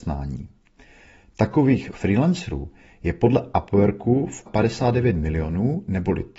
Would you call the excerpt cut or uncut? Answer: cut